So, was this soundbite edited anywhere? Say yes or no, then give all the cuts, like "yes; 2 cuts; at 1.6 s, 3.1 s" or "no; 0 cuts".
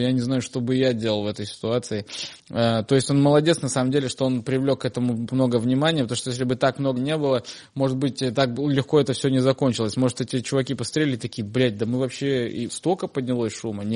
yes; 4 cuts; at 2.4 s, 5.3 s, 7.0 s, 12.7 s